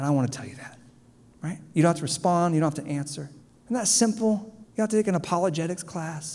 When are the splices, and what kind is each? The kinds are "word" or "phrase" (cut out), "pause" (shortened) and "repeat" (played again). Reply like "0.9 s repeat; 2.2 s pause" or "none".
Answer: 3.4 s pause; 4.6 s pause